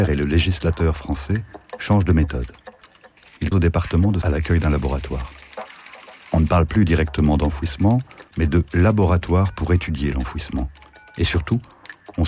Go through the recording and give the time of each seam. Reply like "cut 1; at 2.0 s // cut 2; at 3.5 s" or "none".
cut 1; at 3.5 s // cut 2; at 4.2 s // cut 3; at 8.3 s